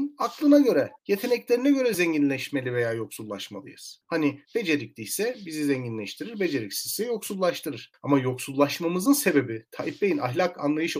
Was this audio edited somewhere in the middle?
no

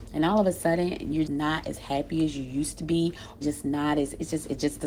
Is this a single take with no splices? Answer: no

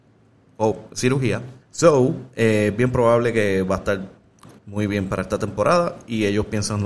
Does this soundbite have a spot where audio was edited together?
yes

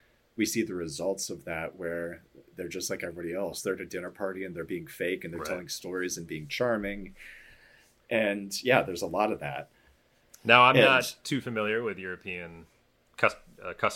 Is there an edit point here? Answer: no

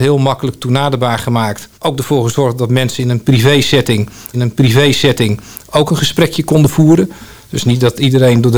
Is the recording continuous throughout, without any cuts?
no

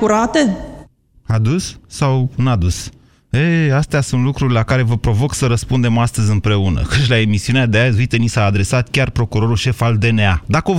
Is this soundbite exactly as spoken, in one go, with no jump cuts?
yes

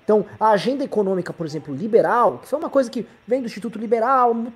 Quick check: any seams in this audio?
no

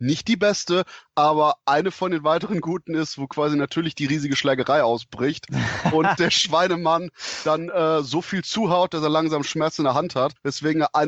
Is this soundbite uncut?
yes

